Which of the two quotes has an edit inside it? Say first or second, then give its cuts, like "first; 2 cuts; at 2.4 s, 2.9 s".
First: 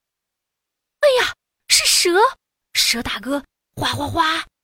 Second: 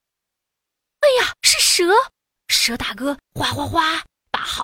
second; 2 cuts; at 1.4 s, 3.2 s